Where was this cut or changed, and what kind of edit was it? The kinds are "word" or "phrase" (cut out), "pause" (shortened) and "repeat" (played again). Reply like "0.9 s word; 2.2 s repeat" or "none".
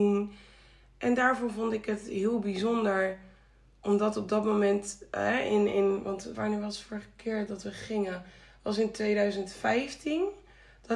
6.3 s word

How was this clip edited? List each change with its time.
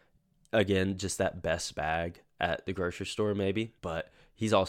3.8 s pause

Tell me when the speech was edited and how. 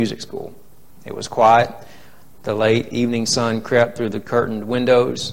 none

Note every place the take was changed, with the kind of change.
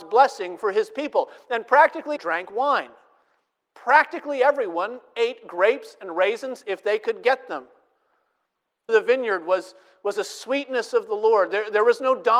2.2 s phrase; 8.9 s phrase

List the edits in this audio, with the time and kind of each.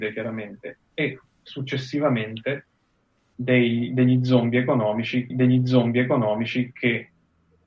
3.3 s word; 5.3 s repeat

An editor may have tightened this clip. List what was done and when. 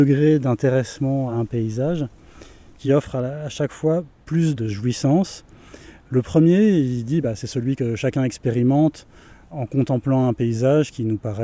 none

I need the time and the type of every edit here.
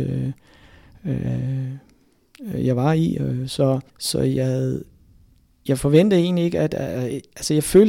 3.9 s pause

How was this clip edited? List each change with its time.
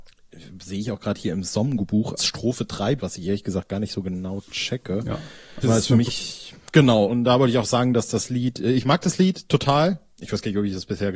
2.2 s word; 3.0 s word; 5.6 s word; 6.1 s word; 7.1 s word

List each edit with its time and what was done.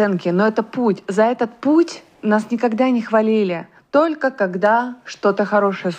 2.1 s pause; 3.7 s pause

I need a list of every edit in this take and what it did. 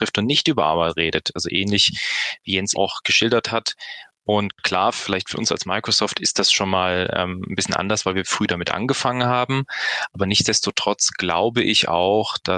2.7 s word

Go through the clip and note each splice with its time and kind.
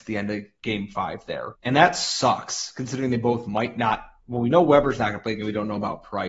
1.5 s pause

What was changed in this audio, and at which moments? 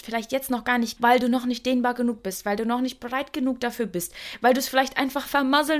1.0 s word

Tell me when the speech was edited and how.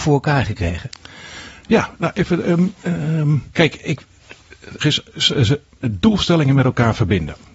3.5 s pause; 4.8 s phrase

